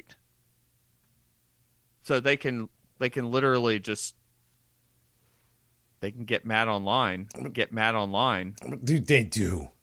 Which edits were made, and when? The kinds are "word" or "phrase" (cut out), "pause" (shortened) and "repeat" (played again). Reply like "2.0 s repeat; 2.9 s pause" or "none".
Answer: 7.5 s repeat